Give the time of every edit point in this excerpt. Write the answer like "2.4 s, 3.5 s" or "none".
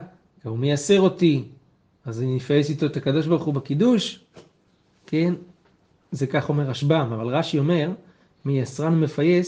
none